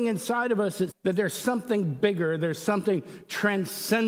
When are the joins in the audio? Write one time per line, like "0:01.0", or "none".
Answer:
0:00.9